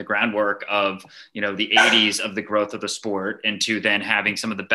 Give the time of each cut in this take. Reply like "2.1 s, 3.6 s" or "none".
none